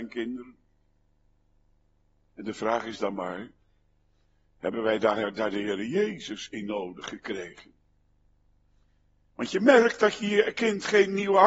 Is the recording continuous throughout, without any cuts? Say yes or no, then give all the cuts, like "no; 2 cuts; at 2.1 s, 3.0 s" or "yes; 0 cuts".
yes; 0 cuts